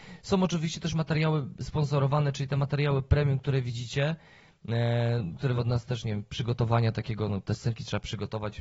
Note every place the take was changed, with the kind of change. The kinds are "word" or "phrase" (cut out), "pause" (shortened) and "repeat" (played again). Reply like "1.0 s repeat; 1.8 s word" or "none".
5.6 s word